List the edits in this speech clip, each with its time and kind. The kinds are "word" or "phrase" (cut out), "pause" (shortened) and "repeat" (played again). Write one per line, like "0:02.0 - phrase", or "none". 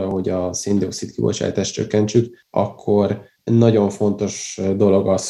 0:03.4 - pause